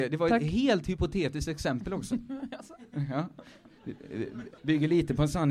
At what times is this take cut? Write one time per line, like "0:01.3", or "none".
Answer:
0:04.6